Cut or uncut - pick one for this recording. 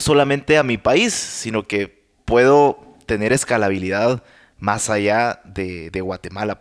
uncut